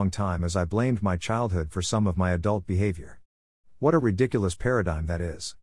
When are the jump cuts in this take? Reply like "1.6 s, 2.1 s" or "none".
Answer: none